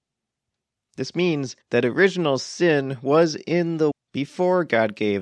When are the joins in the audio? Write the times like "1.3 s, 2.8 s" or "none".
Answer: 1.6 s, 3.9 s